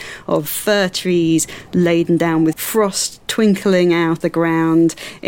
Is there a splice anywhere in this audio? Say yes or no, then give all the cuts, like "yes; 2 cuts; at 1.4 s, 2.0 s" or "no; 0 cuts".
yes; 2 cuts; at 2.5 s, 4.2 s